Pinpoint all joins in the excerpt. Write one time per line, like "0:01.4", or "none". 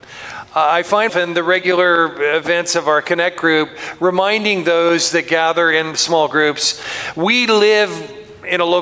0:01.1